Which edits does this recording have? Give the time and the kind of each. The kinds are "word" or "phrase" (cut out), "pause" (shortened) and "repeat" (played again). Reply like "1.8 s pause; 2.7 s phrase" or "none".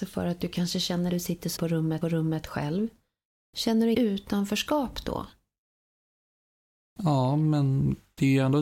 1.1 s phrase; 1.6 s word; 2.0 s repeat; 3.9 s word